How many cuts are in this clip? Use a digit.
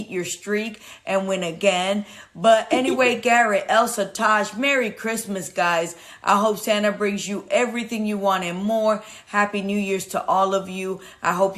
0